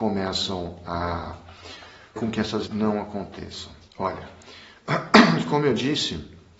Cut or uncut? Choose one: cut